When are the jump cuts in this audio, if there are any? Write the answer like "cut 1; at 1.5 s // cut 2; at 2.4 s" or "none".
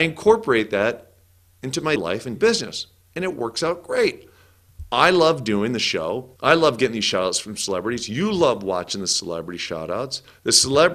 cut 1; at 2.0 s // cut 2; at 2.4 s // cut 3; at 6.4 s